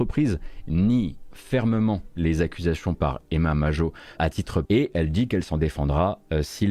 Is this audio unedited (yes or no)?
no